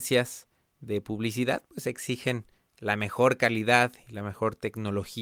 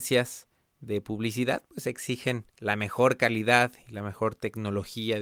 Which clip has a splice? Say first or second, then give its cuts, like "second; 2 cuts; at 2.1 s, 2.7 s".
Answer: second; 1 cut; at 2.5 s